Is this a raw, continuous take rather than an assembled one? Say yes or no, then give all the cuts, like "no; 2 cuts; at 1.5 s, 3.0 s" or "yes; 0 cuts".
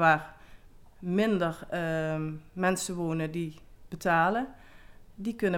yes; 0 cuts